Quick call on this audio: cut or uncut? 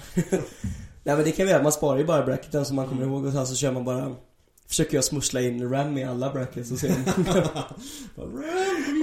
uncut